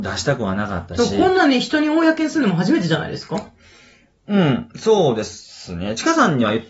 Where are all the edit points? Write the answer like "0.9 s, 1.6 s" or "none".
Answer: none